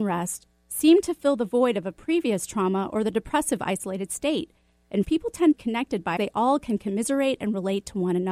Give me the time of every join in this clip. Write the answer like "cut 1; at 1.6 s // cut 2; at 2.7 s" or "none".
cut 1; at 5.0 s // cut 2; at 5.5 s // cut 3; at 6.2 s

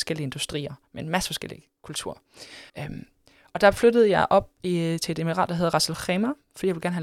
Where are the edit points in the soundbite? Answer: cut 1; at 2.7 s

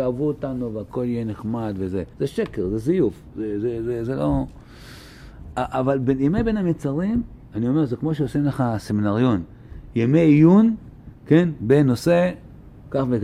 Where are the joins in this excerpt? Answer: cut 1; at 2.1 s // cut 2; at 7.4 s

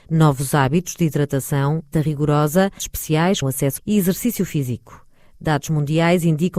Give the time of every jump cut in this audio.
cut 1; at 1.9 s // cut 2; at 2.8 s // cut 3; at 3.4 s // cut 4; at 3.8 s

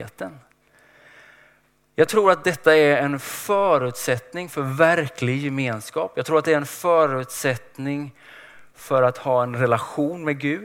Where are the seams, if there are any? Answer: none

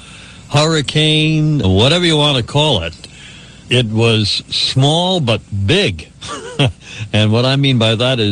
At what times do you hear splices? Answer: cut 1; at 1.6 s // cut 2; at 3.6 s

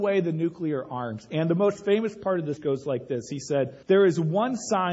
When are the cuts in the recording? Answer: cut 1; at 2.6 s // cut 2; at 3.8 s

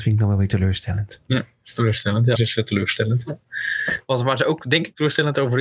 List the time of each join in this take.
cut 1; at 2.4 s

